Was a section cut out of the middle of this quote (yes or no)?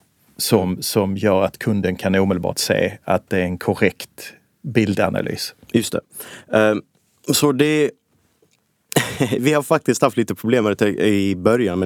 yes